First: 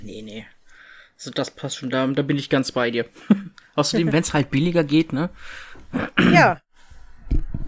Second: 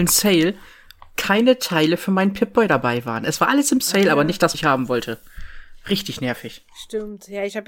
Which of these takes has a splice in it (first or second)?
second